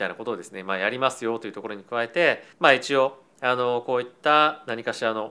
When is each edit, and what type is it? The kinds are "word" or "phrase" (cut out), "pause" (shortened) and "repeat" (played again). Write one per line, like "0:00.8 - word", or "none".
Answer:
0:02.5 - pause